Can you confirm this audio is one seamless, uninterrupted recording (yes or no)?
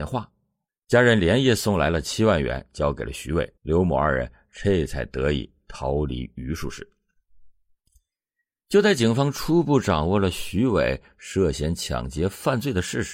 no